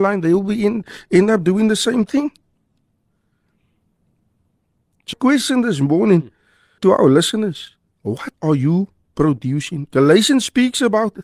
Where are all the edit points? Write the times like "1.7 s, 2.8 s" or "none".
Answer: 5.1 s, 6.8 s, 8.3 s